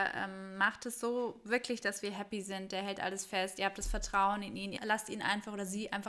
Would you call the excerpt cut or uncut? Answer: cut